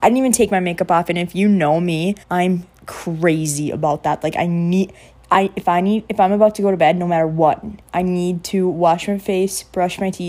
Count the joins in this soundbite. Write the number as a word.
two